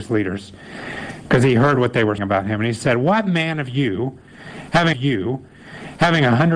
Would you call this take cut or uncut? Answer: cut